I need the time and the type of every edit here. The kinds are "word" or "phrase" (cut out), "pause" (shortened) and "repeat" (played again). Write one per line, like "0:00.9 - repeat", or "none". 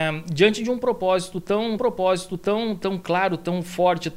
0:01.8 - repeat